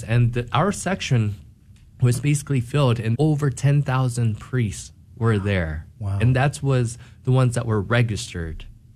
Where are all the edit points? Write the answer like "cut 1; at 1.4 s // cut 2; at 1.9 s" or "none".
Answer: cut 1; at 3.1 s // cut 2; at 5.9 s